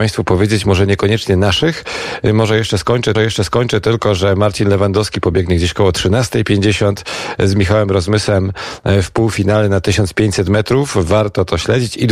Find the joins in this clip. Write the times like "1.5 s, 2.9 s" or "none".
3.1 s